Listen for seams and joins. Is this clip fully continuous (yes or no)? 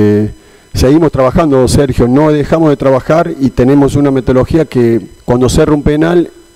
no